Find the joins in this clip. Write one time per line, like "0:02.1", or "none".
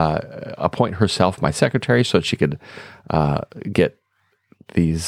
none